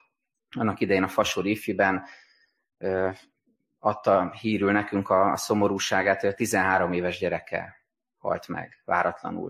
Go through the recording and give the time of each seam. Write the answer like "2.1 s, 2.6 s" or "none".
none